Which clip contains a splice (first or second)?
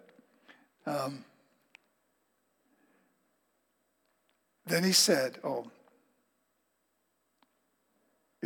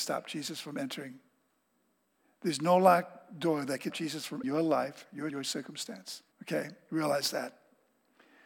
second